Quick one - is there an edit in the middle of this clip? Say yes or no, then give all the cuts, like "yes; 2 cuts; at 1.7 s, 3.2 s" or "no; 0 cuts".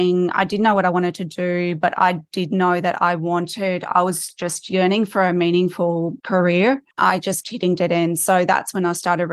yes; 3 cuts; at 6.2 s, 6.9 s, 7.4 s